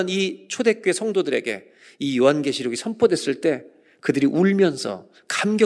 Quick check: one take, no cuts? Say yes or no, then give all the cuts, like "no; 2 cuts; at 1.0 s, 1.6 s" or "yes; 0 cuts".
yes; 0 cuts